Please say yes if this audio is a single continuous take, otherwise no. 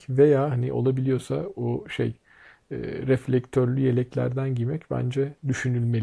yes